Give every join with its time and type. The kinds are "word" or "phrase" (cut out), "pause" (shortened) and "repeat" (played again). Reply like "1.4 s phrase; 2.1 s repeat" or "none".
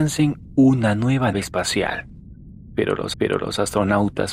1.3 s word; 3.1 s repeat